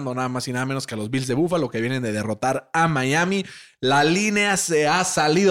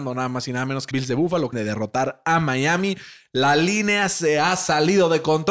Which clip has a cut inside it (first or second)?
second